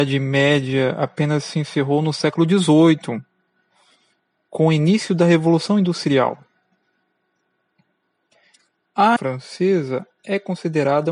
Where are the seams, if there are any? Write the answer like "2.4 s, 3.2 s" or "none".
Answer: 9.2 s